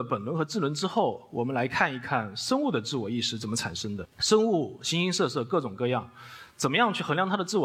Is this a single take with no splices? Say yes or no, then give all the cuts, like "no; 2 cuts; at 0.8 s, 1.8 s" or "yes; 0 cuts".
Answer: no; 1 cut; at 4.1 s